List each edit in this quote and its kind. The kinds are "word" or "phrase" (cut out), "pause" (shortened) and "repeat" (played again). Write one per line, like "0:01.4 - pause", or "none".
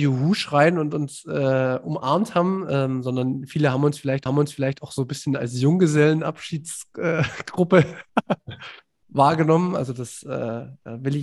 0:04.3 - repeat
0:08.1 - pause

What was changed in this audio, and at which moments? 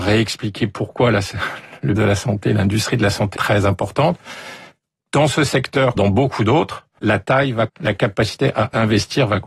0:02.0 - word
0:03.4 - word
0:06.0 - word
0:07.0 - word
0:07.7 - word

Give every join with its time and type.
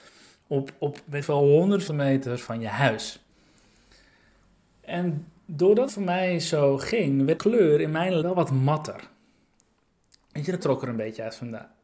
0:01.2 - word
0:01.9 - word
0:05.9 - word
0:07.4 - word
0:08.2 - word
0:10.6 - word

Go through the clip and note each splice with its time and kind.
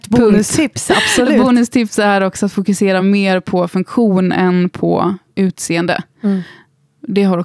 none

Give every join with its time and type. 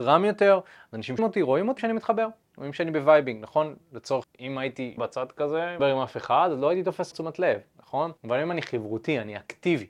0:01.2 - word
0:01.8 - word
0:04.2 - word
0:05.0 - word
0:05.8 - phrase
0:07.1 - word
0:08.2 - pause

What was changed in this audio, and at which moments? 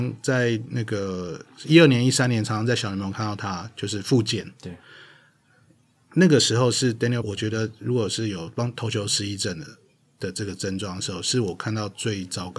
0:07.2 - word

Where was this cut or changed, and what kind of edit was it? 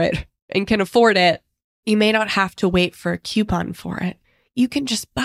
none

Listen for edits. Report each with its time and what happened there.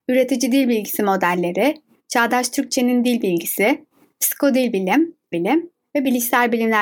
0:05.3 - word

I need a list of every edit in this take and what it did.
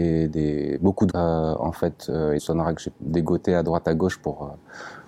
0:01.1 - word
0:02.4 - word
0:02.9 - word

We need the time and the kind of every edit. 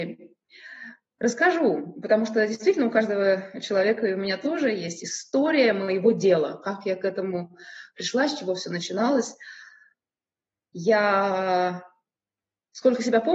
none

